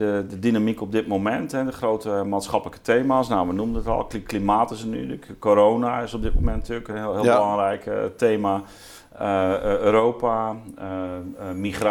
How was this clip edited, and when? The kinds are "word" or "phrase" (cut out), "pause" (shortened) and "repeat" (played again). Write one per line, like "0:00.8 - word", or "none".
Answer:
none